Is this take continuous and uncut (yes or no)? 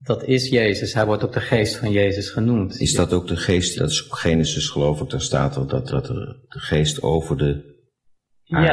no